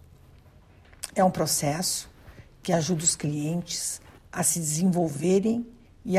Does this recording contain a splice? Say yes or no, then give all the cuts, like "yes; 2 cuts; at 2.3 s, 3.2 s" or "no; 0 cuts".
no; 0 cuts